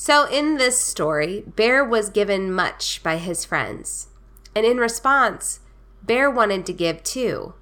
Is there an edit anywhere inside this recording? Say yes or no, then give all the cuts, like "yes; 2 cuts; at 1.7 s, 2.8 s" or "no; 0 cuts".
no; 0 cuts